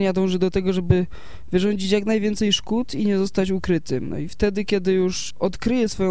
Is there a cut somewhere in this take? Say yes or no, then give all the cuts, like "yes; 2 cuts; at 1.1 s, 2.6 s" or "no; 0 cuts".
no; 0 cuts